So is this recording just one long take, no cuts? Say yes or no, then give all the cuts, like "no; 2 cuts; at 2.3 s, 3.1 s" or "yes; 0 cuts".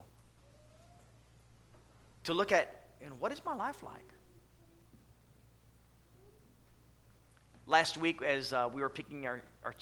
yes; 0 cuts